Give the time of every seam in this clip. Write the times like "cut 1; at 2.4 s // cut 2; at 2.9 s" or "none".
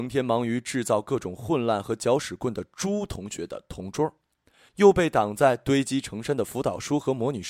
none